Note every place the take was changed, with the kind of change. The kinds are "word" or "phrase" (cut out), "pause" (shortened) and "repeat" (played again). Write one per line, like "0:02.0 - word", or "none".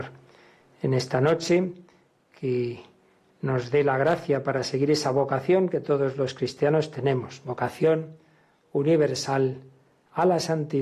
none